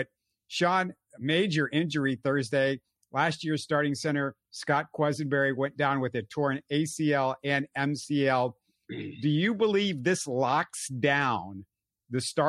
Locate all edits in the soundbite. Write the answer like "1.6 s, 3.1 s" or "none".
none